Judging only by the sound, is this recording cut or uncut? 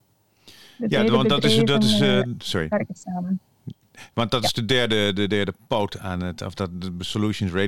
uncut